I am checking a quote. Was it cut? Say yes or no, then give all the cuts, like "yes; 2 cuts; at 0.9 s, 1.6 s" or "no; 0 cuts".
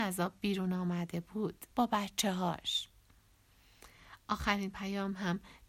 yes; 1 cut; at 1.7 s